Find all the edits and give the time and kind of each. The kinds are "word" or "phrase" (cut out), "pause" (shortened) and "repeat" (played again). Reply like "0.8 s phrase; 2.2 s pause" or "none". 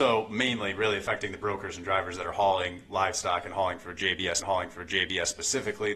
4.4 s repeat